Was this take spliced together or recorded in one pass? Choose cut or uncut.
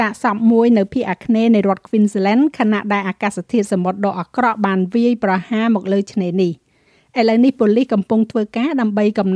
uncut